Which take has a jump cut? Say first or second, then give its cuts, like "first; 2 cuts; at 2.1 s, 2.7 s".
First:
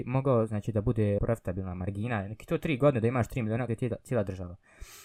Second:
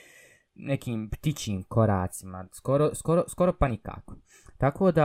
first; 2 cuts; at 1.2 s, 3.7 s